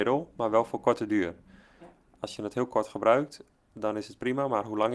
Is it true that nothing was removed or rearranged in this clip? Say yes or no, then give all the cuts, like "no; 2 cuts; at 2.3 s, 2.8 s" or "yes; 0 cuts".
yes; 0 cuts